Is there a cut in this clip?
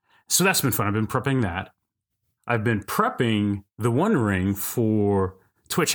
no; 0 cuts

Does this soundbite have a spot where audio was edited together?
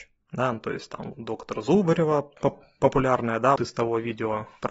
yes; 2 cuts; at 1.1 s, 3.6 s

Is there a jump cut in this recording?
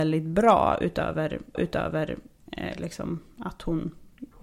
yes; 1 cut; at 1.5 s

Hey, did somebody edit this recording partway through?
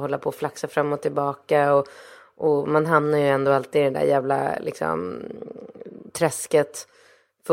no; 0 cuts

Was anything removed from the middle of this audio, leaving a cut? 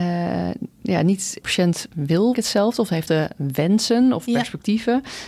yes; 3 cuts; at 1.4 s, 2.3 s, 3.1 s

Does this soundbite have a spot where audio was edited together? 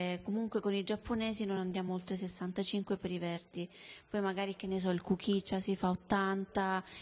no; 0 cuts

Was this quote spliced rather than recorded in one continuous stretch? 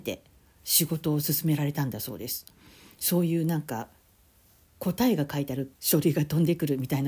yes; 1 cut; at 5.8 s

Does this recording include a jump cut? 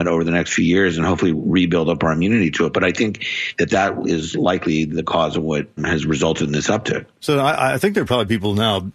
yes; 1 cut; at 5.8 s

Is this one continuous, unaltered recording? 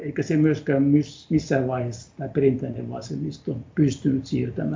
yes; 0 cuts

